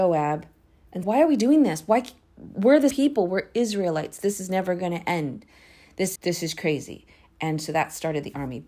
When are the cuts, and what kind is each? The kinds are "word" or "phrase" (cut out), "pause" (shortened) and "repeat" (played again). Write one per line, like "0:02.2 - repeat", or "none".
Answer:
0:01.0 - word
0:02.9 - word
0:06.2 - word